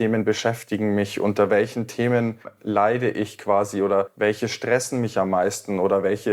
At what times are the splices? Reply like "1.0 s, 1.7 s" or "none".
none